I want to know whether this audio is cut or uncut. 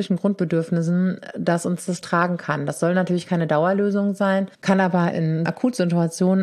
cut